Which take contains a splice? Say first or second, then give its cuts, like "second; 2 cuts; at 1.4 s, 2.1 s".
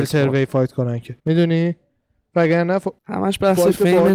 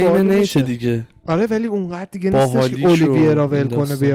first; 2 cuts; at 1.2 s, 3.0 s